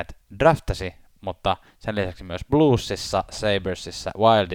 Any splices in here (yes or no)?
yes